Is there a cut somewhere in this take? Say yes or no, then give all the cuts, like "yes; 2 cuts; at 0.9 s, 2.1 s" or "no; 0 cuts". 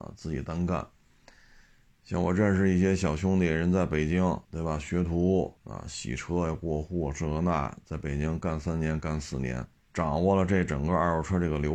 yes; 3 cuts; at 4.4 s, 5.6 s, 9.8 s